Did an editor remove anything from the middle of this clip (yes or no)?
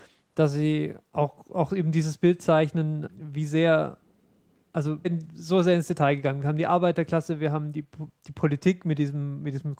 yes